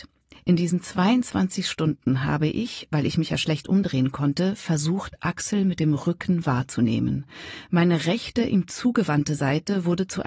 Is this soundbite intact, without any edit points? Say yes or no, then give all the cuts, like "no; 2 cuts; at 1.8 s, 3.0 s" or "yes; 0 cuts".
yes; 0 cuts